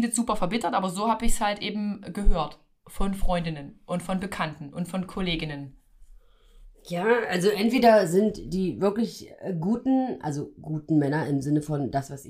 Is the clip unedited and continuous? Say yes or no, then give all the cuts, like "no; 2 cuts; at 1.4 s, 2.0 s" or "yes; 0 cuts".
yes; 0 cuts